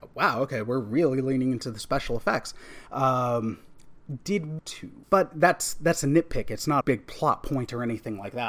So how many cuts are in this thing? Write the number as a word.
three